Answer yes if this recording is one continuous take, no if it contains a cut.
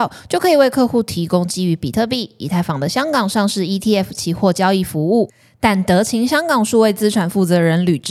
yes